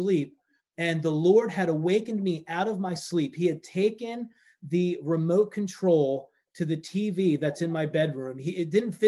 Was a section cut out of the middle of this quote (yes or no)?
no